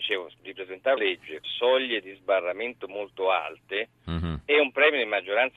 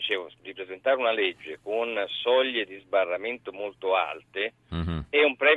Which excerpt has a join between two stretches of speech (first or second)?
first